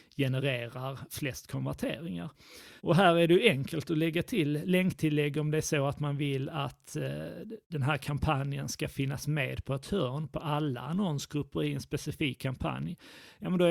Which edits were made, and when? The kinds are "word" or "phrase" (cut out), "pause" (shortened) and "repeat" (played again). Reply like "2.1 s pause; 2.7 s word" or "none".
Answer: 2.8 s pause